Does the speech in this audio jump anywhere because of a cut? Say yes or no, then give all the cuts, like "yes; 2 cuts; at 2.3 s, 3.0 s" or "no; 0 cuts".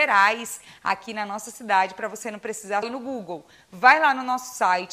yes; 1 cut; at 2.8 s